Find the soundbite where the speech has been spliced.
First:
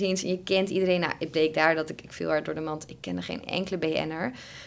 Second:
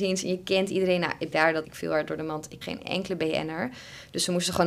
second; 3 cuts; at 1.3 s, 1.6 s, 2.6 s

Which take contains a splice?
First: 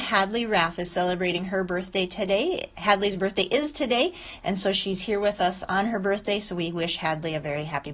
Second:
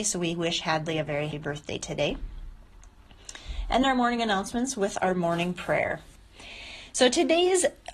second; 2 cuts; at 1.3 s, 3.8 s

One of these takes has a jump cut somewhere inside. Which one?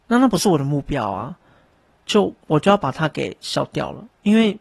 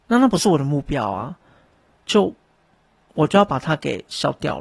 first; 1 cut; at 2.4 s

